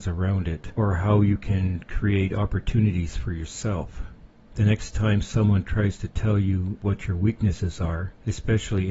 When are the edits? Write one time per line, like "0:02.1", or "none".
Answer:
none